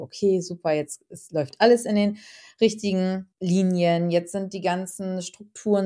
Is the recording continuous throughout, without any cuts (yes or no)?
no